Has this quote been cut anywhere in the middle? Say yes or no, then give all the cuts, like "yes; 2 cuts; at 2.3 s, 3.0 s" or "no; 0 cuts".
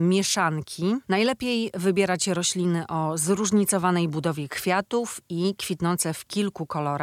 no; 0 cuts